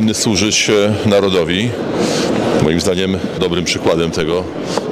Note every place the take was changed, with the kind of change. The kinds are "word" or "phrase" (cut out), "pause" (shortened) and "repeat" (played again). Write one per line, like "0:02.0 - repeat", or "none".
0:03.4 - word